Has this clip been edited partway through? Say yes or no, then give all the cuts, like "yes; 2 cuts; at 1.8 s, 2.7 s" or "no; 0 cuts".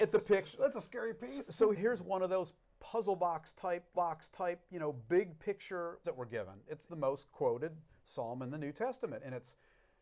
yes; 4 cuts; at 1.7 s, 3.9 s, 6.0 s, 6.9 s